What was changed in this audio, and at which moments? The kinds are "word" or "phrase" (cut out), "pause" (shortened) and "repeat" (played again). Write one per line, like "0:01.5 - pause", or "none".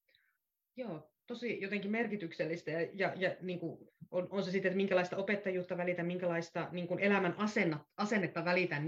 none